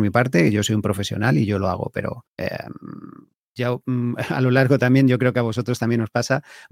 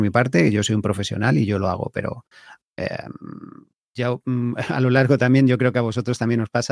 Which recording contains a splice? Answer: first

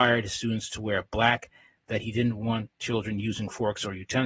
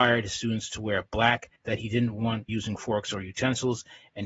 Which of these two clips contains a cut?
second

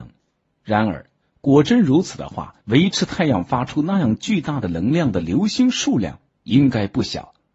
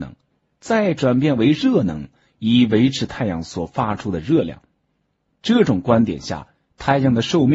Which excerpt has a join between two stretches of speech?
first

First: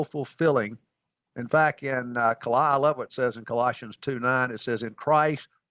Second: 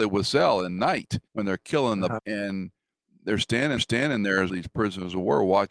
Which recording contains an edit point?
second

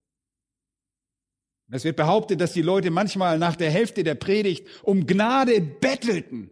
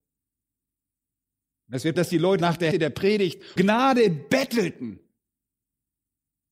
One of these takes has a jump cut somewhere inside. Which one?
second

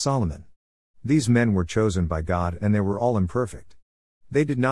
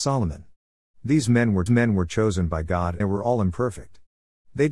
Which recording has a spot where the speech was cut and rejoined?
second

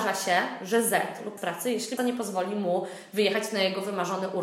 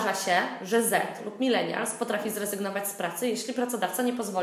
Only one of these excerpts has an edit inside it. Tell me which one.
first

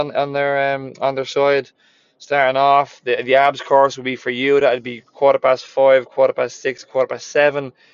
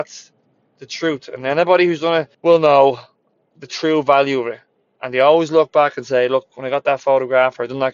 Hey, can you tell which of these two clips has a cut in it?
second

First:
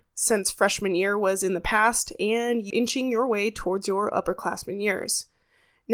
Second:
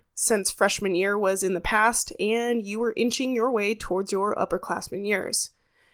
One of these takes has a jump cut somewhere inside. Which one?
first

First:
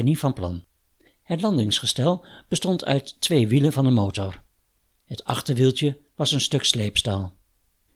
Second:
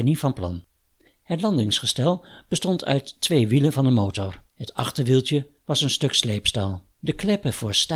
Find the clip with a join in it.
second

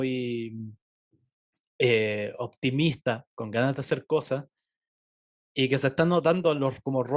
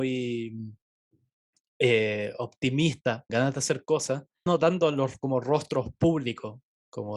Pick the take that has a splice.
second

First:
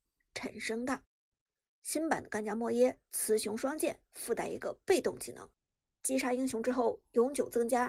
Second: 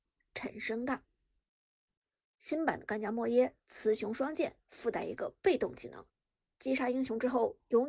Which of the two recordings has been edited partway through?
first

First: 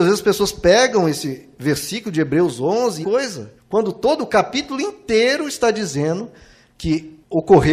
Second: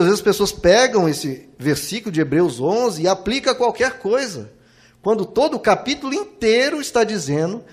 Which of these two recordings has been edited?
first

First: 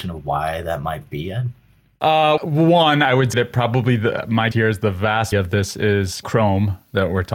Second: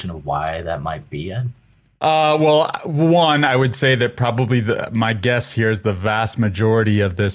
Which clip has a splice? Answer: first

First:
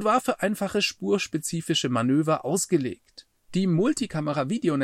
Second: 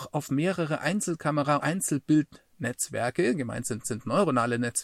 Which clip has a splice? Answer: second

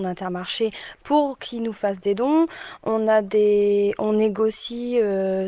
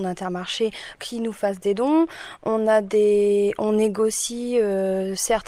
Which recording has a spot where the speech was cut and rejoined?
second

